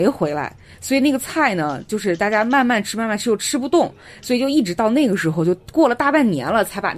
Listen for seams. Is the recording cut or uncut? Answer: uncut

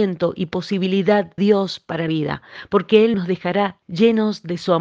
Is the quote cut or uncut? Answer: cut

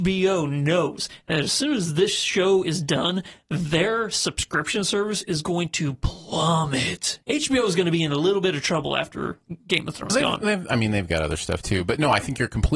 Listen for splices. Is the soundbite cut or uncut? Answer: cut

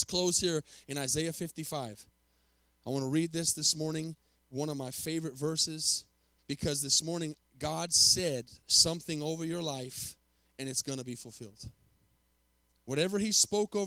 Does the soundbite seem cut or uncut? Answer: uncut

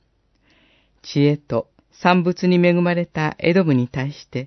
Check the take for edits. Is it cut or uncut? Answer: cut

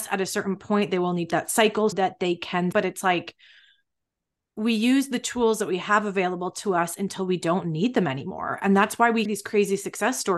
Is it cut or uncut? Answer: cut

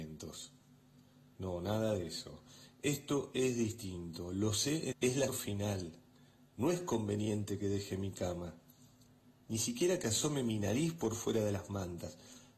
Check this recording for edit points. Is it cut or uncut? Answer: cut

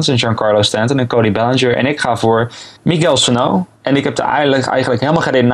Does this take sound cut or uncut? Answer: cut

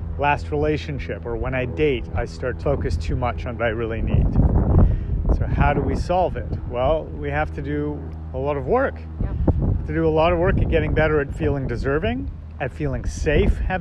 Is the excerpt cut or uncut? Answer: cut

